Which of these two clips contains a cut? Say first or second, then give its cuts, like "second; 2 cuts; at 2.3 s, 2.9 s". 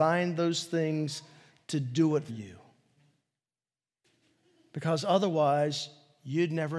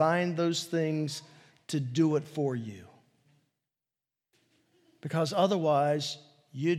first; 1 cut; at 2.3 s